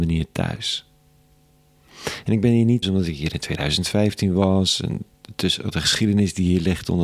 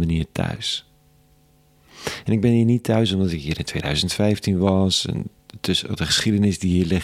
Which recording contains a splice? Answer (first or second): first